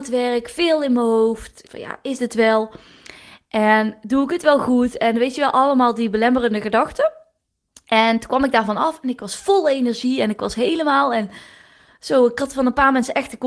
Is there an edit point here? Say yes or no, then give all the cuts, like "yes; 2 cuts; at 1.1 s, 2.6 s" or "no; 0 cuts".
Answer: yes; 2 cuts; at 1.6 s, 2.2 s